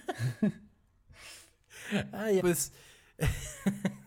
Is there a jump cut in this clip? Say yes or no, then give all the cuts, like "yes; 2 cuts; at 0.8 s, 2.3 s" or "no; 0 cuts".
yes; 1 cut; at 2.4 s